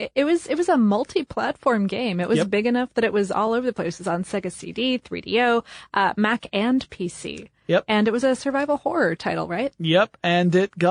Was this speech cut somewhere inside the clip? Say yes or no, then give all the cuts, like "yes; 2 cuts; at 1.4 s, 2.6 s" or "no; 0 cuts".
no; 0 cuts